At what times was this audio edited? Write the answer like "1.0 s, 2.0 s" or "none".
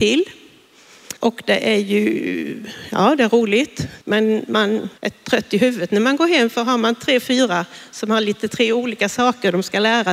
1.2 s, 4.0 s, 5.0 s